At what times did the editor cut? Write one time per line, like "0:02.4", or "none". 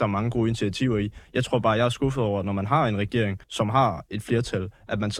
0:03.4